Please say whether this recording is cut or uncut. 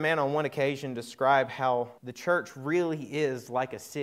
cut